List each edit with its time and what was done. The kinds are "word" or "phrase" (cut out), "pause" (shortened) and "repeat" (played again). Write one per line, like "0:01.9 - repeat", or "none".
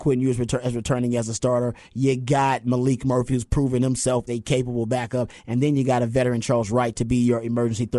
0:04.3 - word